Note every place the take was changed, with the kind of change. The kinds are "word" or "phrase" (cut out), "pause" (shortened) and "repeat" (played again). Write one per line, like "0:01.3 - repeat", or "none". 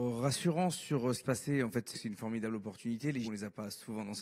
0:01.2 - phrase
0:01.9 - word
0:03.2 - word